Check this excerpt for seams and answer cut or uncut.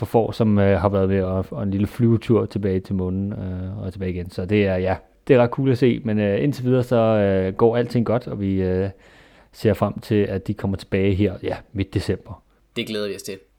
uncut